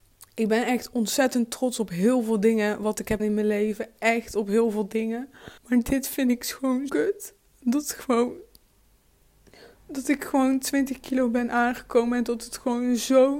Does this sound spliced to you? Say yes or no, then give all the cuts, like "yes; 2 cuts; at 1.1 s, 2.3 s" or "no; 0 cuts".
yes; 5 cuts; at 3.2 s, 5.6 s, 6.9 s, 7.4 s, 9.7 s